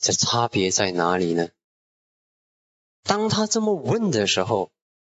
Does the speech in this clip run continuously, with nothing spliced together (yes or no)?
yes